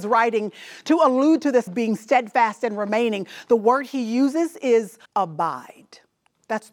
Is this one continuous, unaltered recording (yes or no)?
no